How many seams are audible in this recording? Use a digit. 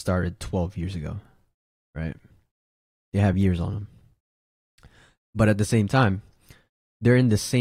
0